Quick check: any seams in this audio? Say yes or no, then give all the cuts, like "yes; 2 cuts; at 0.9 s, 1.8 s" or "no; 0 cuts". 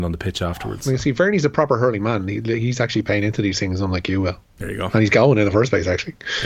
no; 0 cuts